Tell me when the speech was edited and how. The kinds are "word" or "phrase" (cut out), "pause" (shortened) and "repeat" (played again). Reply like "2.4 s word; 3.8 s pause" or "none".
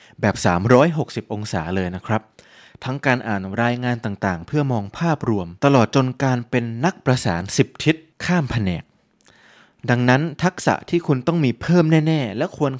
5.6 s pause

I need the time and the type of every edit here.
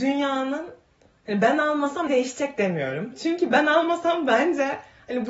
2.1 s word

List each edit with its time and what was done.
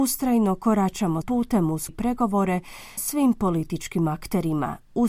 1.2 s word; 1.9 s word; 3.0 s word

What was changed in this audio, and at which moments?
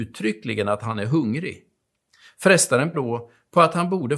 2.9 s word

